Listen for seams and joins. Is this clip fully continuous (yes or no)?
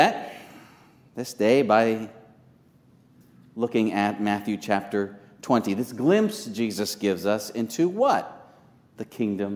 yes